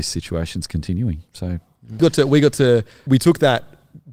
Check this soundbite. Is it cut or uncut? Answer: cut